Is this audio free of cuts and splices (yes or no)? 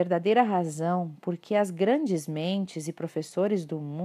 yes